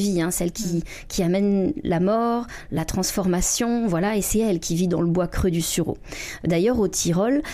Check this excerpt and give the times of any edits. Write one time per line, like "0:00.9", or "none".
none